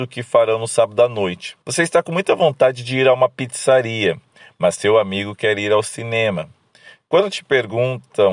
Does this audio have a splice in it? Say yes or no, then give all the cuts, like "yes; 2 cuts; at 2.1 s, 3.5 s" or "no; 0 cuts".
yes; 1 cut; at 1.6 s